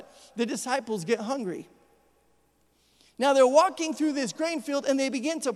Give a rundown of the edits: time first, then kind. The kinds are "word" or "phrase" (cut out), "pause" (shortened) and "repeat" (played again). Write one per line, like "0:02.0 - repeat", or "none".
none